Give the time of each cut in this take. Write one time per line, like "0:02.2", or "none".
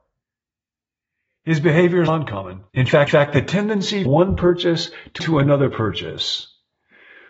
0:02.1
0:02.7
0:03.1
0:04.1
0:05.2